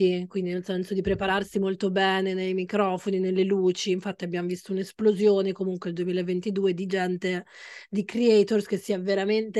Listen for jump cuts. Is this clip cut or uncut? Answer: uncut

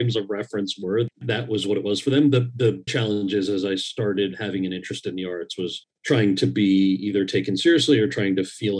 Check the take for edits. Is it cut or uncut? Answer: cut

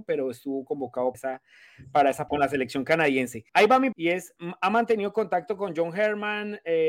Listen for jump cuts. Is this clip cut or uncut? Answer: cut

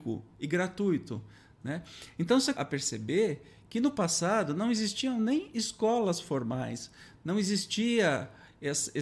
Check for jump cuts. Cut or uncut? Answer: cut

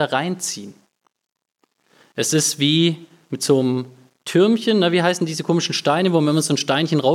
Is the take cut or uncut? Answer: uncut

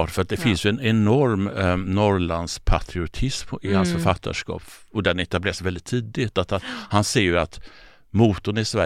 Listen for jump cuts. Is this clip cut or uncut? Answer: uncut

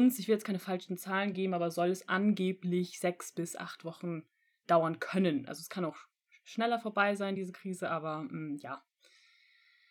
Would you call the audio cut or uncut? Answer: uncut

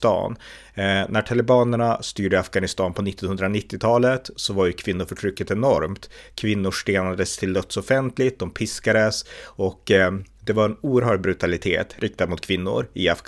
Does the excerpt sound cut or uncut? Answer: uncut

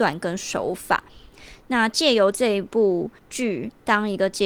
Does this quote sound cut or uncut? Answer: cut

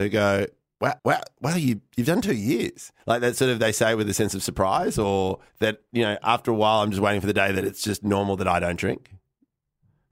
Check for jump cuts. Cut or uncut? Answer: cut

